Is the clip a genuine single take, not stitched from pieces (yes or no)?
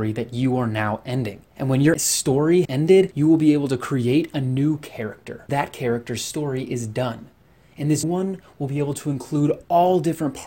no